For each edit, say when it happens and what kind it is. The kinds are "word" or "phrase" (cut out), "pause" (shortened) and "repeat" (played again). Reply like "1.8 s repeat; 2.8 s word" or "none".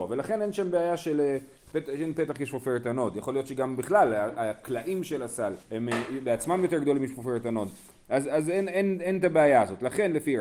5.6 s pause